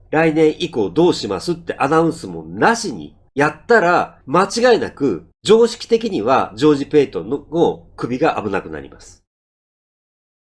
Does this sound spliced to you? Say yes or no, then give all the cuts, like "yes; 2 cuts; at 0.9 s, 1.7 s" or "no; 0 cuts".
yes; 3 cuts; at 3.3 s, 4.2 s, 5.3 s